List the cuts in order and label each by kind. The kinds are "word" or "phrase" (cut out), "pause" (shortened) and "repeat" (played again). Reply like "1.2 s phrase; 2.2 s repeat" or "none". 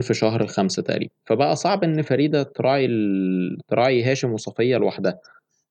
none